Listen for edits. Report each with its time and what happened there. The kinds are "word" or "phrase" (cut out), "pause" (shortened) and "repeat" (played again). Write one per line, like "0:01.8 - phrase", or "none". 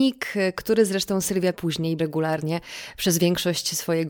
0:01.5 - word
0:02.0 - word